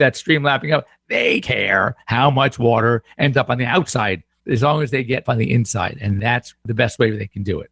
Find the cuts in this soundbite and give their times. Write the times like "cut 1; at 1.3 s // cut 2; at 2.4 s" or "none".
cut 1; at 1.4 s // cut 2; at 5.2 s // cut 3; at 6.5 s